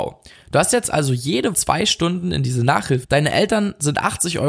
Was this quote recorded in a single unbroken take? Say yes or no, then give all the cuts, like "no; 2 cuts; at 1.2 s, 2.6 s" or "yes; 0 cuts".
no; 2 cuts; at 1.5 s, 3.0 s